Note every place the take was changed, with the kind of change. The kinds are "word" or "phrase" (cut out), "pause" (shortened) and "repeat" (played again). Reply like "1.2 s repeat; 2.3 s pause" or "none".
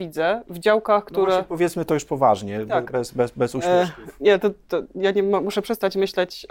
none